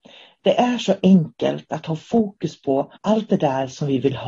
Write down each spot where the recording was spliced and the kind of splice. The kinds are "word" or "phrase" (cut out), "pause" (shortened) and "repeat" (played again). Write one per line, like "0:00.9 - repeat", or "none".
0:03.0 - pause